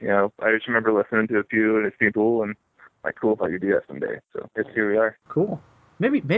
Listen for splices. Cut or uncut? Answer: cut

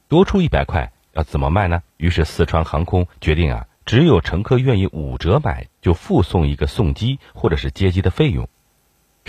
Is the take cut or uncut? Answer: cut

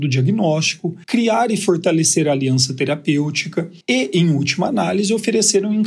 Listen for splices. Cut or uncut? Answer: cut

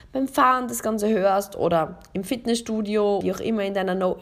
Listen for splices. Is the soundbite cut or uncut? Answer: cut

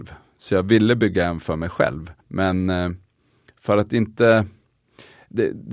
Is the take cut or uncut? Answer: cut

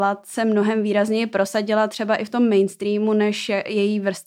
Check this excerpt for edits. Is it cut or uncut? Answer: uncut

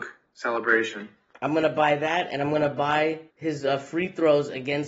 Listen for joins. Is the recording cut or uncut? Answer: cut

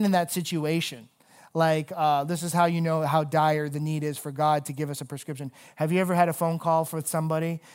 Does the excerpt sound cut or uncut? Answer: uncut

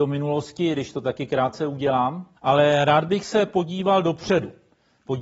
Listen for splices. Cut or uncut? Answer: cut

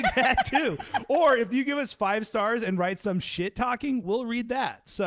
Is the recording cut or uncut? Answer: uncut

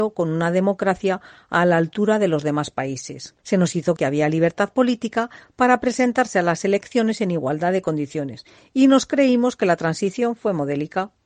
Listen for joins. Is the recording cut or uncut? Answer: cut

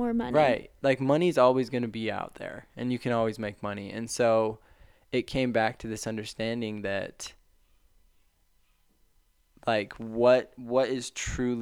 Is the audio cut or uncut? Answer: uncut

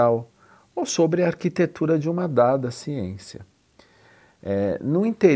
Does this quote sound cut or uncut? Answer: uncut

